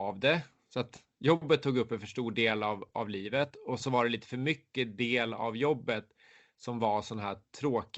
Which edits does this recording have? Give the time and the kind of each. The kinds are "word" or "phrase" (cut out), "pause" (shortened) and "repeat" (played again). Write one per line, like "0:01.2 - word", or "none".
0:03.8 - word